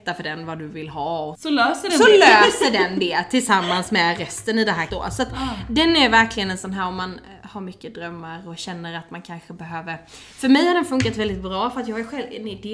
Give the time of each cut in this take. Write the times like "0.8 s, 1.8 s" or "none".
1.3 s, 4.9 s